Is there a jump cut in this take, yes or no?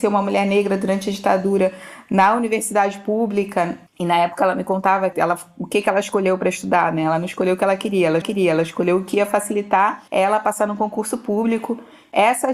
yes